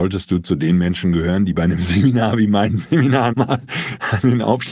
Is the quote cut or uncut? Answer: cut